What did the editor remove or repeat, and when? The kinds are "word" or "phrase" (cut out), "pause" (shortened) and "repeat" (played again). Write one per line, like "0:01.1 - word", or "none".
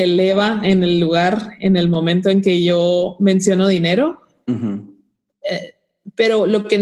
none